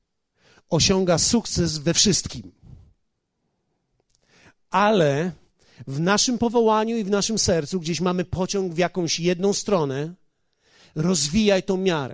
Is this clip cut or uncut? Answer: uncut